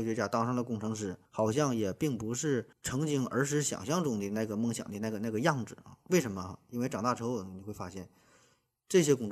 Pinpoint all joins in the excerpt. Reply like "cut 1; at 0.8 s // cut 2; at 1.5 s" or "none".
cut 1; at 1.2 s // cut 2; at 2.7 s

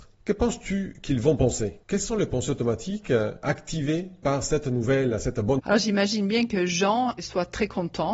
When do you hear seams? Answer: cut 1; at 5.6 s

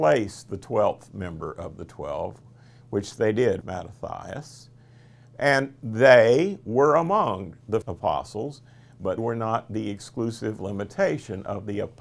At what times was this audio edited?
cut 1; at 3.6 s // cut 2; at 7.8 s // cut 3; at 9.2 s

